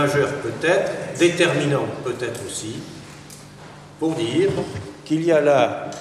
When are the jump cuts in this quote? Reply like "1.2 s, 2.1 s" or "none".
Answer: none